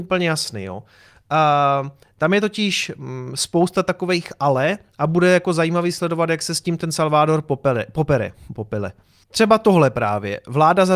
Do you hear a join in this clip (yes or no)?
no